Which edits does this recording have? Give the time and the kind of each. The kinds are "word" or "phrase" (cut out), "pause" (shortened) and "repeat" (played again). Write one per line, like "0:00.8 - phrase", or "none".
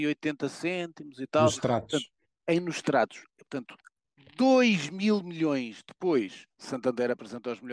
none

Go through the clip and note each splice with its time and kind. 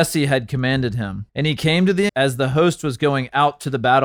0:01.3 - pause
0:02.1 - word

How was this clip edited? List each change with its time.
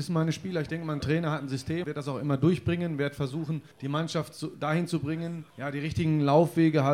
0:01.0 - word
0:01.8 - word
0:03.7 - pause
0:05.5 - pause

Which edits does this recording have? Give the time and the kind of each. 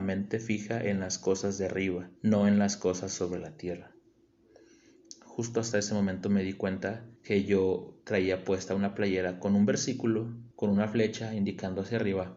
0:02.2 - pause
0:07.2 - pause
0:10.5 - pause

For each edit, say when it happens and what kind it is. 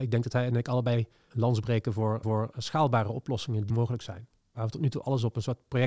0:01.3 - word
0:02.2 - repeat
0:03.7 - word

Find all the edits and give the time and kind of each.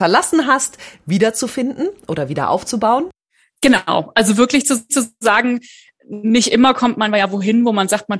0:04.9 - repeat

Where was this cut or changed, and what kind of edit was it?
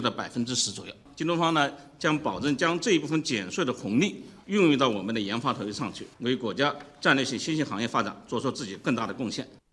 0:06.1 - pause

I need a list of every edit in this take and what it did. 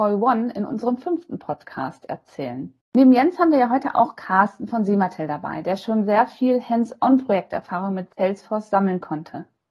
0:02.8 - pause
0:08.1 - pause

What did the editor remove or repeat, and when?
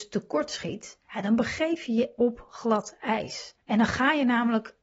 0:01.0 - pause
0:02.1 - word
0:03.6 - pause

